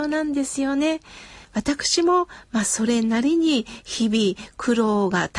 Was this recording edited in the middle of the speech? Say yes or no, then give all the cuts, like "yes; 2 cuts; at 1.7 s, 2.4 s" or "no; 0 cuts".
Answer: yes; 1 cut; at 1.4 s